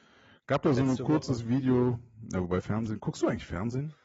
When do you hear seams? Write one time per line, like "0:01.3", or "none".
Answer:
none